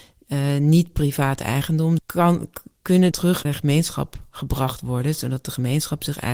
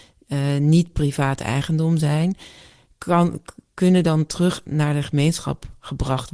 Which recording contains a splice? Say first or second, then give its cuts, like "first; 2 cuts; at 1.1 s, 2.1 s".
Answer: first; 3 cuts; at 2.0 s, 3.1 s, 3.4 s